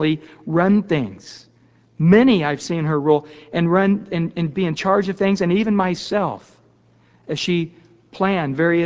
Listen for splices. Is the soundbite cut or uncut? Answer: uncut